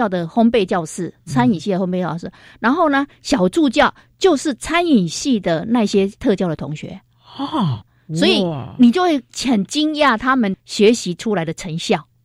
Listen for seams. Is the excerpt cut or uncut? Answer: uncut